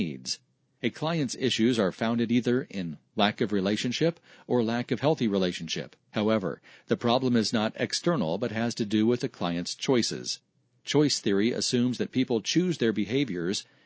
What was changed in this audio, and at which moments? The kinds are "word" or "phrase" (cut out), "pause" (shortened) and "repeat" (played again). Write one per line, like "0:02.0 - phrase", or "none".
0:06.0 - pause